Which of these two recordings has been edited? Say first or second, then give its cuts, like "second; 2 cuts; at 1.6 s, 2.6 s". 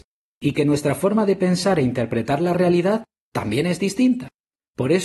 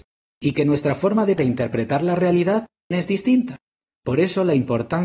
second; 2 cuts; at 1.4 s, 2.9 s